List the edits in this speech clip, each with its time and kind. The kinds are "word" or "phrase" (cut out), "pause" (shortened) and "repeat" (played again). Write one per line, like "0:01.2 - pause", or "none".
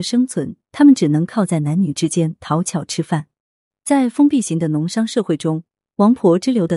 none